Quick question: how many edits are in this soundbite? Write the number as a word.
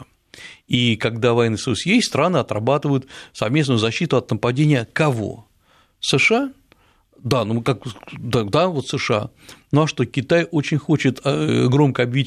zero